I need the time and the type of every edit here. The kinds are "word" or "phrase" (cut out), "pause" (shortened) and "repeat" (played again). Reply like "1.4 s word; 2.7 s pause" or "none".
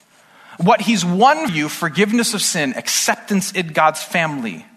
1.5 s word